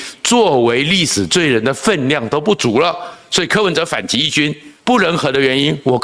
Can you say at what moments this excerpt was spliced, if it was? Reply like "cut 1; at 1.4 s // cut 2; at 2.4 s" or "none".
cut 1; at 4.8 s

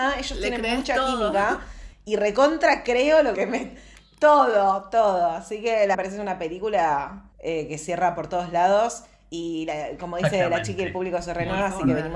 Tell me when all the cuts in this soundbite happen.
cut 1; at 3.3 s // cut 2; at 5.9 s // cut 3; at 7.3 s

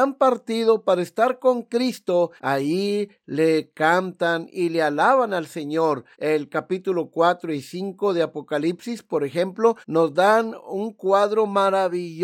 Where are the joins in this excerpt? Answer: cut 1; at 2.4 s // cut 2; at 6.1 s // cut 3; at 9.8 s

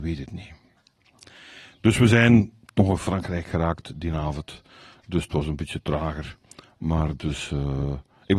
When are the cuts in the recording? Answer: none

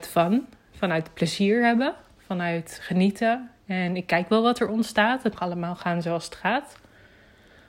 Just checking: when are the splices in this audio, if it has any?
cut 1; at 5.4 s

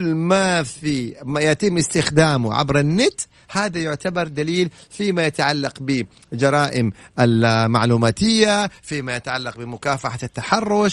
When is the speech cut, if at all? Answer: none

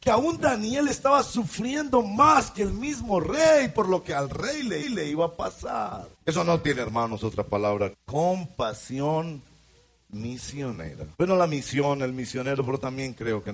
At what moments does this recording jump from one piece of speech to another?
cut 1; at 4.8 s // cut 2; at 6.2 s // cut 3; at 7.9 s // cut 4; at 11.1 s

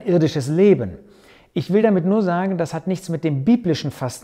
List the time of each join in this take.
none

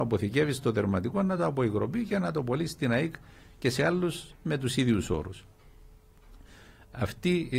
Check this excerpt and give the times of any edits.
none

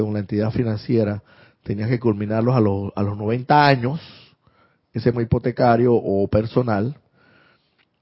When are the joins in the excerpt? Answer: cut 1; at 5.1 s

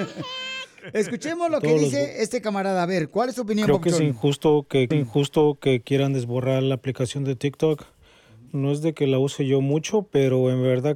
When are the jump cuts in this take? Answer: cut 1; at 4.9 s

